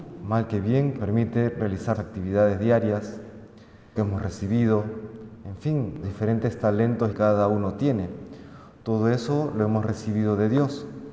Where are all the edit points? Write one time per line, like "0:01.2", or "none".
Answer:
0:01.0
0:01.9
0:04.0
0:06.0
0:07.1